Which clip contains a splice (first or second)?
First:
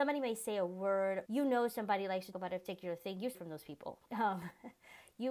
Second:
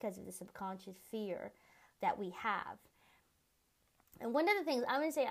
first